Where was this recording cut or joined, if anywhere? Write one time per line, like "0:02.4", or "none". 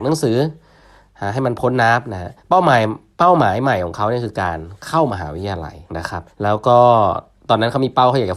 0:02.4
0:05.9
0:06.3